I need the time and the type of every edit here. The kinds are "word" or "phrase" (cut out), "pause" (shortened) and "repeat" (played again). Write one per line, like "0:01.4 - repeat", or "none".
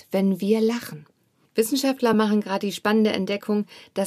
none